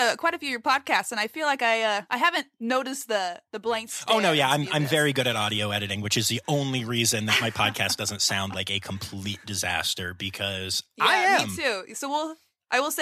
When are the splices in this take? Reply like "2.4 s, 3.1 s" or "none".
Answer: 2.1 s, 3.5 s